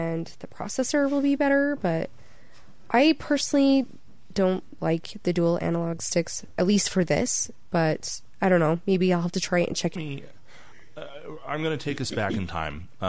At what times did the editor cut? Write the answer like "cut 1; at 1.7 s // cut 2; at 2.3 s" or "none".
cut 1; at 10.0 s